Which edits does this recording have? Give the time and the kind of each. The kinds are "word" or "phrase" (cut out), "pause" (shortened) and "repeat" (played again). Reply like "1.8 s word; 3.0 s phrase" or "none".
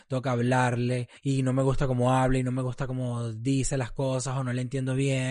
1.2 s pause